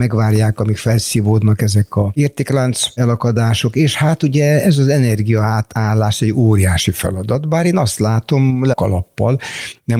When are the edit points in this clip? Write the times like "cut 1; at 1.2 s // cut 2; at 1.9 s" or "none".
cut 1; at 8.7 s